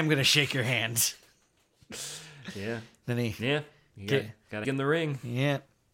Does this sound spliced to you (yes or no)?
yes